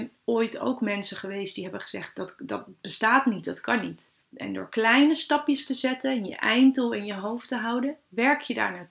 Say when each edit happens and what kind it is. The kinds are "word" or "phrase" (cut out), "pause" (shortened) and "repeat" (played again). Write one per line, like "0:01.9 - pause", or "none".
0:04.2 - pause